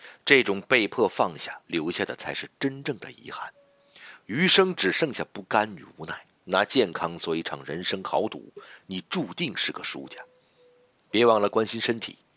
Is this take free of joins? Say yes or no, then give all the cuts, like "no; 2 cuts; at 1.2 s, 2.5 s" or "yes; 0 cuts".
no; 2 cuts; at 1.6 s, 6.3 s